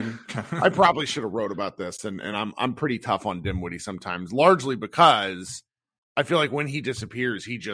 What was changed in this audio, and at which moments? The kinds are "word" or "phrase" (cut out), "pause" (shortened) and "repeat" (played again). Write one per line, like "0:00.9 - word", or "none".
none